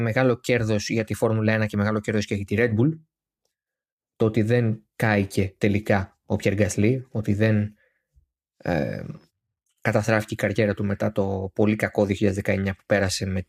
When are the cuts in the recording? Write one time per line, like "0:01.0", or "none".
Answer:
none